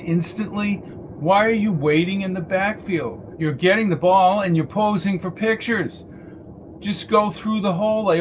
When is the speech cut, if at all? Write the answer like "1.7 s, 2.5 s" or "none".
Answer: none

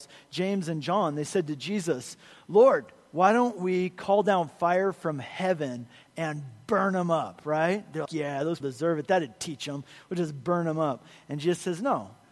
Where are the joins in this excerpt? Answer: 8.1 s, 8.6 s

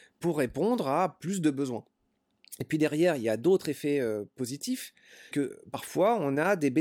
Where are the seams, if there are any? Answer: 5.3 s

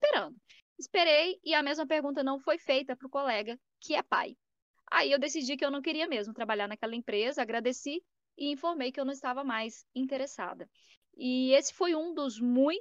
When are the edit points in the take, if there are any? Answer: none

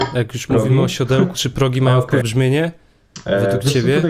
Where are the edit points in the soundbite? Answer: 1.3 s, 2.2 s

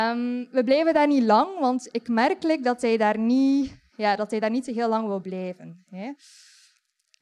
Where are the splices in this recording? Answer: none

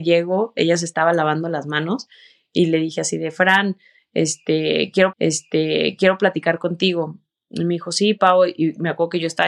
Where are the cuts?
5.1 s

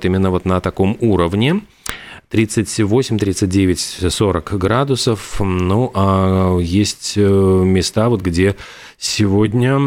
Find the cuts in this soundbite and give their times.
none

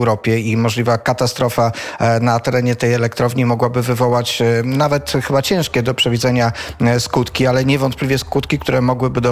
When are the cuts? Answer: none

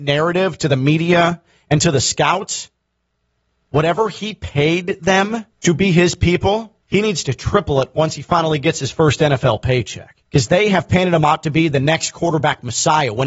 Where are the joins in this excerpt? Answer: 5.5 s, 6.8 s, 10.3 s

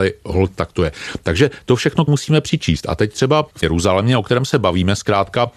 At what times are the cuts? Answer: 2.1 s, 3.6 s

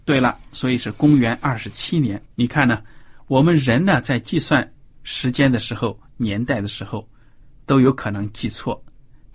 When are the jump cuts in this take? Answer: 2.3 s

